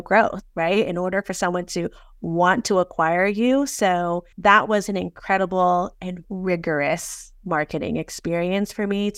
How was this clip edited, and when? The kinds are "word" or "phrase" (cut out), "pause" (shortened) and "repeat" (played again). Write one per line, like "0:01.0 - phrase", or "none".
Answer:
0:04.3 - pause
0:06.2 - word